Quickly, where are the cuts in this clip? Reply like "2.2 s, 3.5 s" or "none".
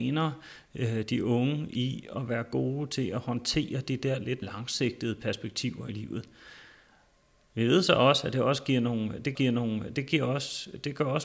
4.4 s, 9.3 s